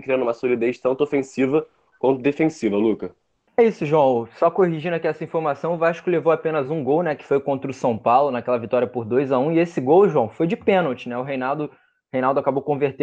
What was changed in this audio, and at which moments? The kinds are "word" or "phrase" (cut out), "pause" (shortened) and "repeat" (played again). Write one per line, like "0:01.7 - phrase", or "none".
none